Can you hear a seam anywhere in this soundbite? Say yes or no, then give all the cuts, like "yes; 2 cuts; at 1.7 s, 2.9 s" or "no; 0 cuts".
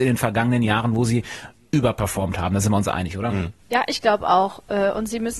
no; 0 cuts